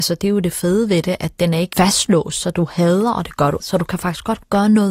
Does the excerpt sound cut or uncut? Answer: cut